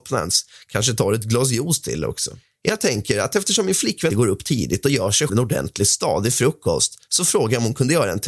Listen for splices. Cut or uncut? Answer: cut